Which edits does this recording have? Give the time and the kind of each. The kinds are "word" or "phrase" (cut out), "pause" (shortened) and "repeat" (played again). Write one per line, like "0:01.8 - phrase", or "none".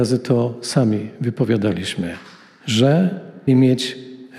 0:03.5 - word